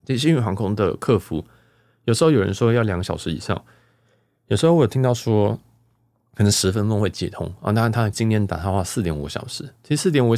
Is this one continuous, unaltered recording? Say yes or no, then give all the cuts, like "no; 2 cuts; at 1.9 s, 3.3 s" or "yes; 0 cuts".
no; 1 cut; at 8.1 s